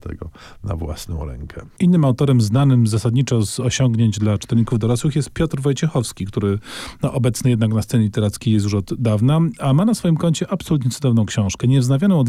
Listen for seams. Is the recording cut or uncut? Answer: uncut